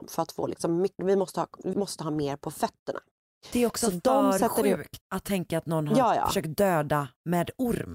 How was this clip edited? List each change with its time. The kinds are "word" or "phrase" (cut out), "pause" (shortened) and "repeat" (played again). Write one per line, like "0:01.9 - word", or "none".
0:01.0 - word
0:01.7 - word
0:05.0 - pause